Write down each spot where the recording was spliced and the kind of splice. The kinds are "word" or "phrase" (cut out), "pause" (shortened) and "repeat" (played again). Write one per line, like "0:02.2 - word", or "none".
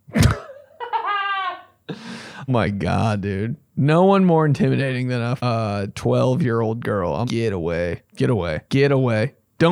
0:02.5 - word
0:05.4 - word
0:07.2 - word
0:08.1 - pause
0:08.7 - pause